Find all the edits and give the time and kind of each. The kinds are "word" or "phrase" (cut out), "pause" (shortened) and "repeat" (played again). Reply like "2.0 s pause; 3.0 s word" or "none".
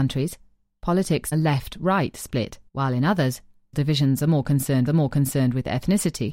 1.3 s phrase; 2.7 s pause; 3.7 s word; 4.9 s repeat